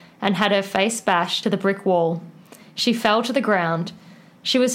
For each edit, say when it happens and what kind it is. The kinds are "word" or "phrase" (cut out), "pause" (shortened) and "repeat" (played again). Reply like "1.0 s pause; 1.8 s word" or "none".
1.4 s word